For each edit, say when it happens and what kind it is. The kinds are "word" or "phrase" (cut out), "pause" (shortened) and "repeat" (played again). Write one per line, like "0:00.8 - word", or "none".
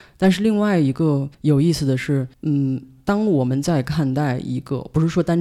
0:01.3 - pause
0:02.3 - pause